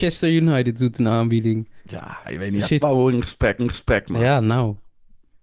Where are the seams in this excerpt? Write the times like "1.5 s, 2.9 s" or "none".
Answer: 2.2 s, 2.8 s, 3.6 s